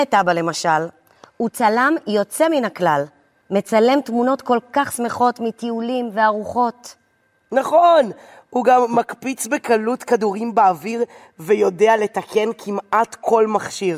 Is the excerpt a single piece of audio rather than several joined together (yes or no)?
yes